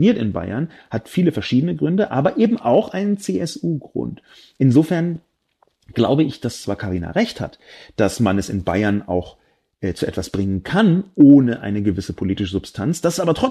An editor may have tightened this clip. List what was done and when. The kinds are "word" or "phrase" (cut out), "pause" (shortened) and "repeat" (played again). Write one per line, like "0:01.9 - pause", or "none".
none